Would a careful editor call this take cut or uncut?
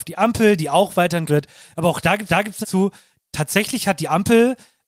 cut